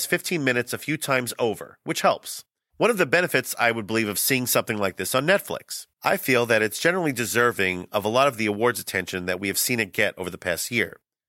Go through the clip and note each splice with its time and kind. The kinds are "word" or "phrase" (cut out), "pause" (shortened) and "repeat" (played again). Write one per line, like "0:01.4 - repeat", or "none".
0:05.9 - pause